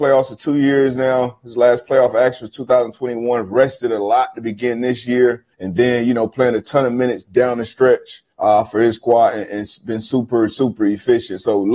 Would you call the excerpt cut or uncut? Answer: cut